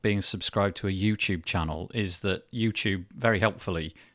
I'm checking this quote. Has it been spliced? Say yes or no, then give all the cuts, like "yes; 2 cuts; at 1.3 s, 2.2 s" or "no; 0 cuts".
no; 0 cuts